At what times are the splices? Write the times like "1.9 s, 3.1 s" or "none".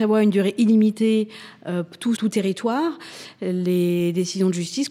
2.2 s